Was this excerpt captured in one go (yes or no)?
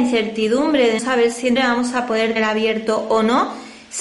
no